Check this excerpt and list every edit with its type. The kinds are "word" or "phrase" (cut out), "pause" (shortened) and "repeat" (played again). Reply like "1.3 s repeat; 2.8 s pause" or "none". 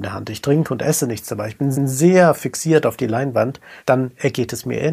1.7 s repeat; 3.8 s pause